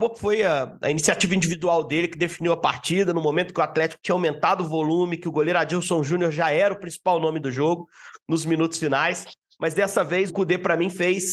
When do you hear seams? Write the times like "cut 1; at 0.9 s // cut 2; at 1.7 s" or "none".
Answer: cut 1; at 10.3 s